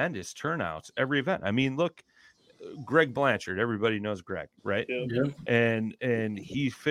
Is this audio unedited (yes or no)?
no